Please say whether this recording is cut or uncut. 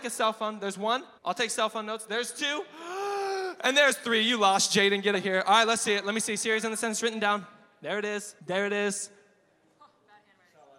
cut